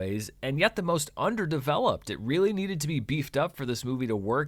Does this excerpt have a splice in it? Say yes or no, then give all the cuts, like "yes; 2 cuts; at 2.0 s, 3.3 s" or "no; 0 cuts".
no; 0 cuts